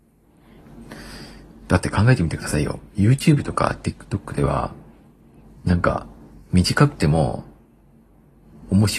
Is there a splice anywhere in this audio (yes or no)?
no